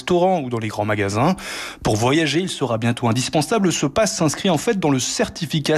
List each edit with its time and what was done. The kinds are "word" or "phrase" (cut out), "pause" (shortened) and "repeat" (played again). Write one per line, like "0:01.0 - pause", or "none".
none